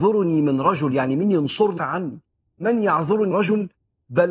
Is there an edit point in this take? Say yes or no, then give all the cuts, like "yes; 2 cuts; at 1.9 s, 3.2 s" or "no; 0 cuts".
yes; 2 cuts; at 1.8 s, 3.3 s